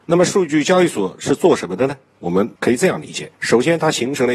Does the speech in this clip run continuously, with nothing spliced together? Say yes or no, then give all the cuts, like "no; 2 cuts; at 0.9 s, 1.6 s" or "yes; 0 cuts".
no; 1 cut; at 2.6 s